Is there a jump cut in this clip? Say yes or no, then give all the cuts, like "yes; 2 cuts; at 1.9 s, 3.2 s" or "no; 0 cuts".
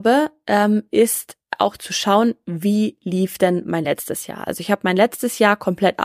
no; 0 cuts